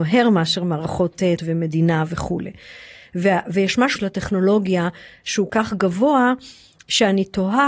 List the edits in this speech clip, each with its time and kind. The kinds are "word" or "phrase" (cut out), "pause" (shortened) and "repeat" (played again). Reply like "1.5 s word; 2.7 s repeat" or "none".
1.4 s word; 4.0 s word; 5.5 s word